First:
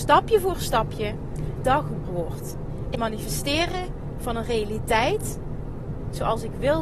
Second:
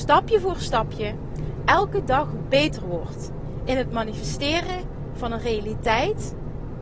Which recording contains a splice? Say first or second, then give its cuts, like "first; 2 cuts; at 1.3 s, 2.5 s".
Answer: first; 3 cuts; at 1.6 s, 2.0 s, 2.9 s